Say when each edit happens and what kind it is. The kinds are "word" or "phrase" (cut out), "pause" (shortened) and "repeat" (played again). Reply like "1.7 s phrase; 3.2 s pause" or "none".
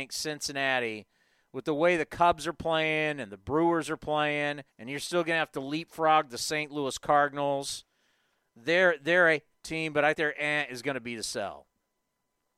4.7 s pause; 9.5 s word; 10.1 s word